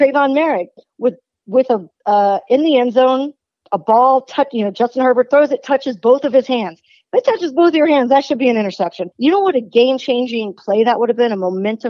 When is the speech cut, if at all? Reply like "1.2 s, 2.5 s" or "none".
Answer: 9.1 s